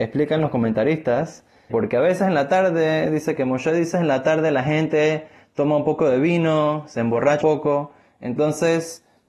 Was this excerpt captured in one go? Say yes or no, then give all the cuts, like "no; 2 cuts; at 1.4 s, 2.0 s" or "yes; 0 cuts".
no; 3 cuts; at 1.7 s, 3.9 s, 7.4 s